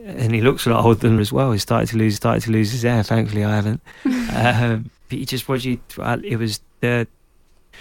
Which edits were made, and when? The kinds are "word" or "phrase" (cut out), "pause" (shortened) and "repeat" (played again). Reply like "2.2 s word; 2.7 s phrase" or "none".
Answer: 1.2 s phrase; 2.2 s repeat; 5.0 s pause; 6.7 s pause